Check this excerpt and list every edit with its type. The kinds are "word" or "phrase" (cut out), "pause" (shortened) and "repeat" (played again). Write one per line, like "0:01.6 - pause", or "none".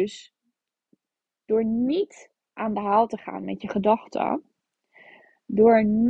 none

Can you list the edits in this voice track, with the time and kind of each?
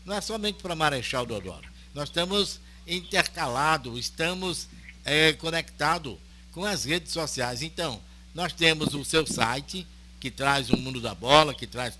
none

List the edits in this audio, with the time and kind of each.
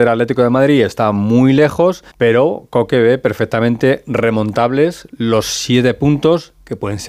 0:02.1 - pause

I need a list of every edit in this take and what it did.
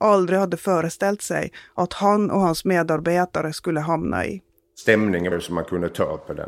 0:05.3 - word

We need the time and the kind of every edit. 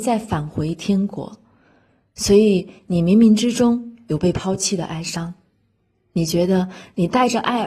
none

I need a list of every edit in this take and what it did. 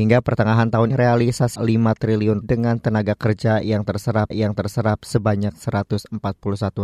0:00.9 - word
0:01.6 - phrase
0:02.4 - word
0:04.3 - repeat

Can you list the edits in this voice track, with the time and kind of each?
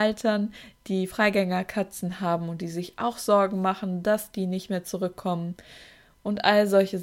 none

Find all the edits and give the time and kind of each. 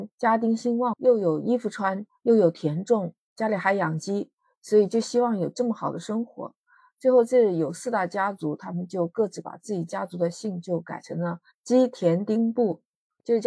none

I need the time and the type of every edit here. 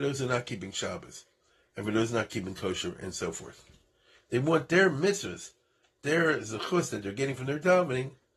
none

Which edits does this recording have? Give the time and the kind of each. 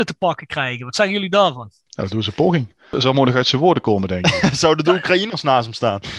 none

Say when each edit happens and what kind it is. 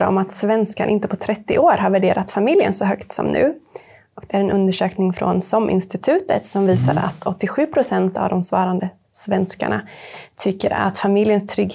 none

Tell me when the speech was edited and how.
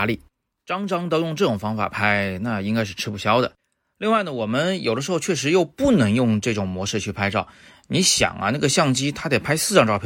none

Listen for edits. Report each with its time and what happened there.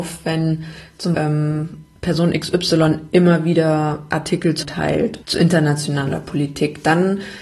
0:01.1 - word
0:01.9 - pause
0:04.6 - word
0:05.2 - word

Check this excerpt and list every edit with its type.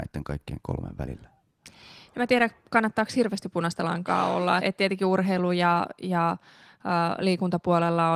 0:04.6 - word

